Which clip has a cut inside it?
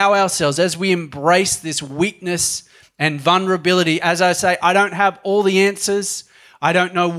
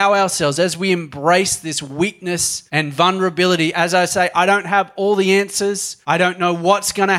second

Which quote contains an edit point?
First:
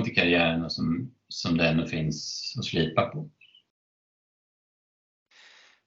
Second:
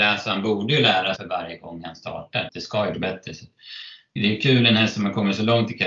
second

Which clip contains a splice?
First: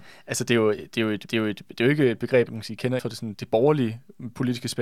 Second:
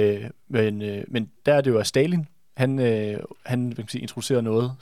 first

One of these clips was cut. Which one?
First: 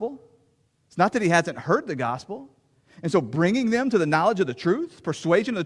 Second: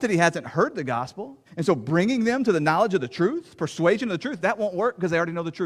second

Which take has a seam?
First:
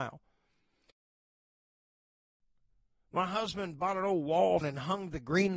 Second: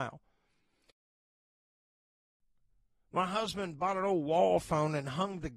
first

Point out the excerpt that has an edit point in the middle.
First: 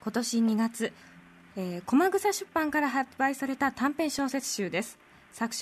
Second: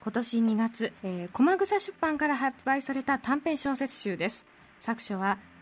second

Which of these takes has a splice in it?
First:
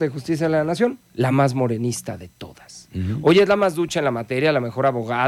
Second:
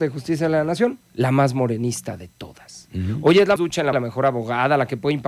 second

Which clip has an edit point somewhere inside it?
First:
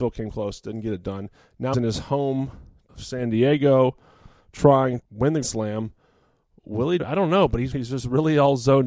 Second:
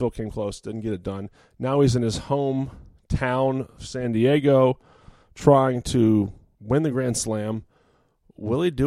first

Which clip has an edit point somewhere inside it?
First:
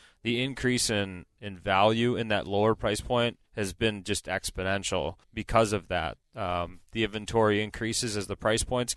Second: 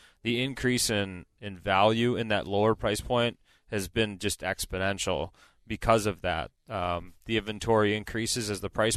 first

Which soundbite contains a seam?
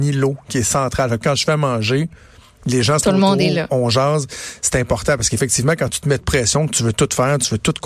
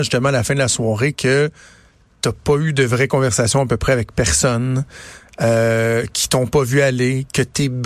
first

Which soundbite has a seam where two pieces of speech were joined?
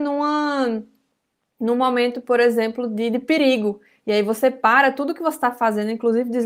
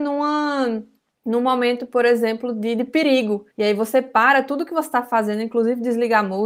second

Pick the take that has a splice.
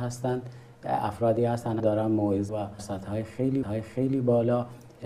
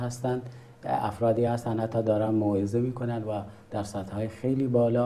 first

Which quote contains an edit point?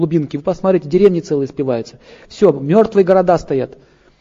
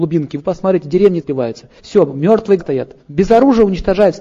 second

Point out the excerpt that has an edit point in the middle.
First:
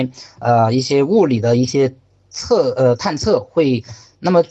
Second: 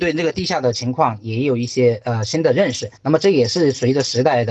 second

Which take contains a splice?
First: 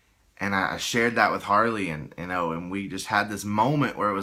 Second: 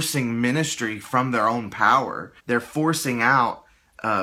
second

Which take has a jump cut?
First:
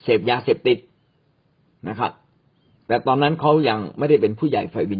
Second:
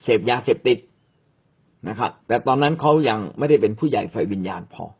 second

